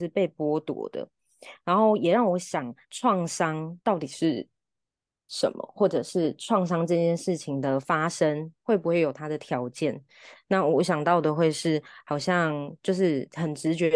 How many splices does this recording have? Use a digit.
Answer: 2